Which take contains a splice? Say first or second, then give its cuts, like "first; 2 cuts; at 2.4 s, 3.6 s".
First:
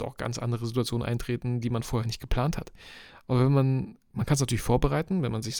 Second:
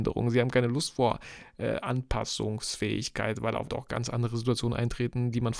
second; 1 cut; at 3.7 s